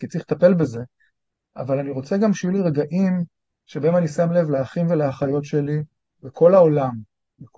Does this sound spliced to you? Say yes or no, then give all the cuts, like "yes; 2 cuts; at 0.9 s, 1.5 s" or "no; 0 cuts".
no; 0 cuts